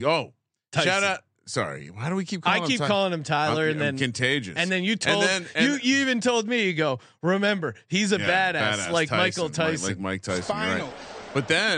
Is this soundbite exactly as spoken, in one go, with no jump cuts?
yes; 0 cuts

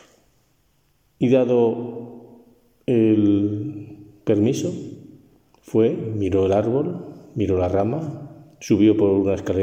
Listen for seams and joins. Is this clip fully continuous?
yes; 0 cuts

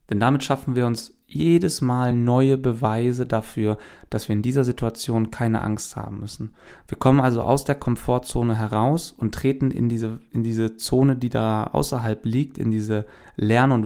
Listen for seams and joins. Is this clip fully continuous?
yes; 0 cuts

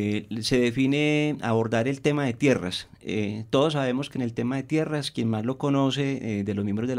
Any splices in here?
no; 0 cuts

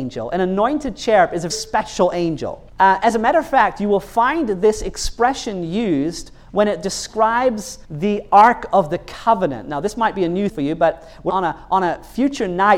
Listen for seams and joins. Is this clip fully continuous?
no; 5 cuts; at 1.5 s, 2.7 s, 7.8 s, 10.5 s, 11.3 s

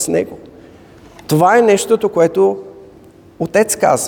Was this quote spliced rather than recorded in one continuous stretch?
no; 0 cuts

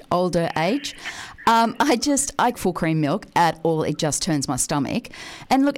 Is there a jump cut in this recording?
yes; 1 cut; at 2.5 s

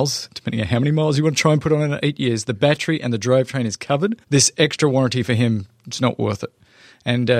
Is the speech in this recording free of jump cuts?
no; 1 cut; at 4.2 s

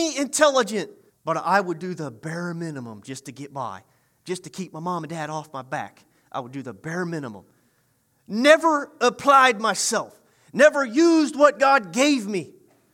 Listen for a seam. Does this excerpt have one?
yes; 1 cut; at 1.1 s

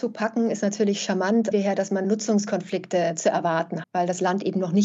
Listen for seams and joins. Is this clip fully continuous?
no; 3 cuts; at 1.5 s, 2.0 s, 3.8 s

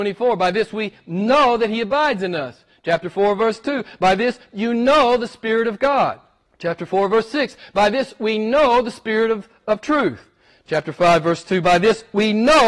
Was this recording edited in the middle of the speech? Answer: yes; 1 cut; at 6.5 s

